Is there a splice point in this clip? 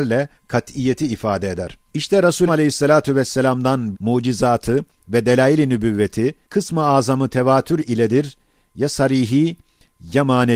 yes; 4 cuts; at 1.9 s, 2.5 s, 3.9 s, 6.4 s

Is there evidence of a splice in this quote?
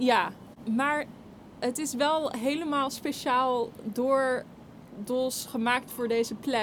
no; 0 cuts

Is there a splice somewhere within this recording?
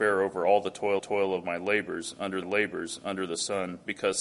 yes; 2 cuts; at 1.0 s, 2.4 s

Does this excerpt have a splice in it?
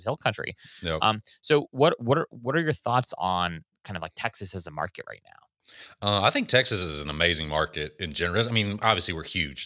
no; 0 cuts

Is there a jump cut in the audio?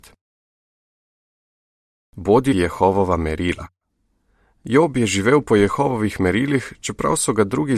yes; 1 cut; at 2.5 s

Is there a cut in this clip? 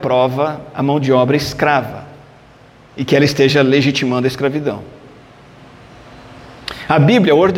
no; 0 cuts

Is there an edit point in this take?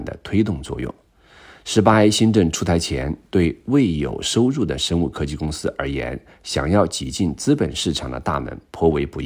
no; 0 cuts

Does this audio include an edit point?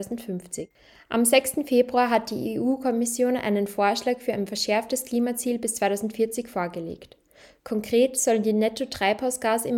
no; 0 cuts

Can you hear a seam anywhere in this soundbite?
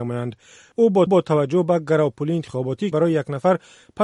yes; 2 cuts; at 1.1 s, 2.9 s

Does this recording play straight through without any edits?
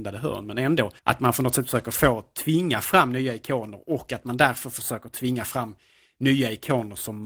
no; 1 cut; at 1.0 s

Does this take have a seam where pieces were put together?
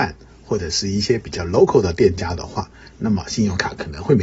no; 0 cuts

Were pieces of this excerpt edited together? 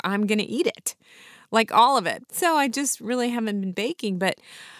no; 0 cuts

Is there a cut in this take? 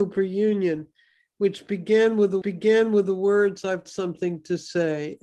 yes; 2 cuts; at 2.4 s, 3.9 s

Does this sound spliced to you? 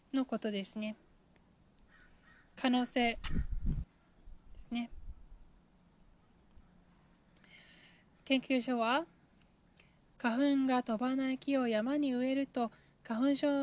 yes; 1 cut; at 3.8 s

